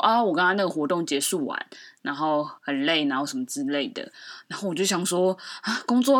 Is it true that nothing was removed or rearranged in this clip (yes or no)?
no